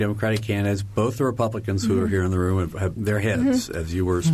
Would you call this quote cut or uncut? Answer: cut